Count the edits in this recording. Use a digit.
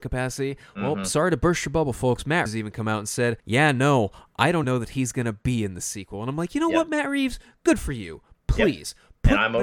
3